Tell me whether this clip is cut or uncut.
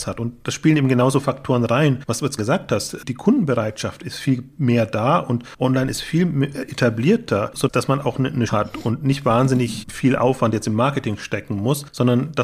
cut